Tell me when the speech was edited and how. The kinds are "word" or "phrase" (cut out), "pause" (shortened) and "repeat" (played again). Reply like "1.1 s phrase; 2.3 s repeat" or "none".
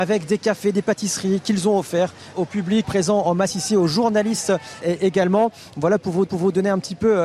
2.3 s word; 2.8 s word; 4.8 s word; 6.3 s repeat